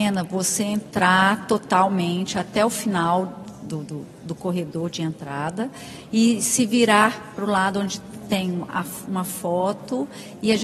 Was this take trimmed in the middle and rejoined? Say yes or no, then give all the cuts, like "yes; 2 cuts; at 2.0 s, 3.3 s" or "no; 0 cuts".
no; 0 cuts